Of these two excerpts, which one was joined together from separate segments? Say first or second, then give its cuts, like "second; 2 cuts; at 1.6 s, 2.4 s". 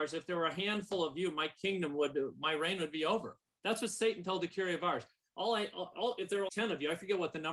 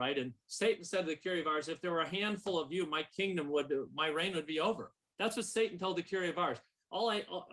first; 1 cut; at 6.5 s